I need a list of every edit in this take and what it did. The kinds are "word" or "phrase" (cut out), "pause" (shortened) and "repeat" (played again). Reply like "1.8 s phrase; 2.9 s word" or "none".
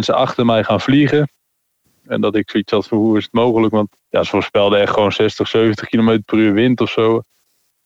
4.0 s pause